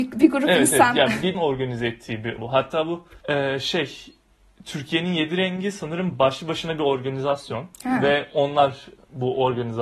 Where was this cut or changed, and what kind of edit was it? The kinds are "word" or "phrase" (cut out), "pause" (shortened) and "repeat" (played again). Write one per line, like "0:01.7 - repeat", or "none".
0:01.3 - phrase
0:02.4 - word
0:03.2 - pause
0:07.7 - pause